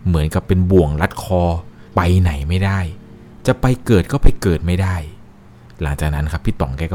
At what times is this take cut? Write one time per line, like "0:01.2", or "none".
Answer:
0:01.9